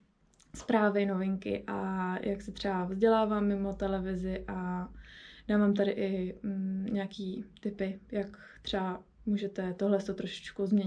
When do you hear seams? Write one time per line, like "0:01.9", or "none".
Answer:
none